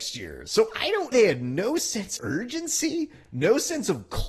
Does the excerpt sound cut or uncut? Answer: cut